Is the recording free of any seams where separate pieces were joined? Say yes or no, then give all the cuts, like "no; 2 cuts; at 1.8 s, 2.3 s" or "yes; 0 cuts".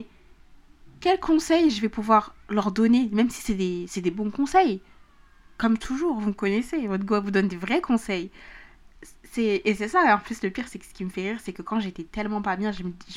yes; 0 cuts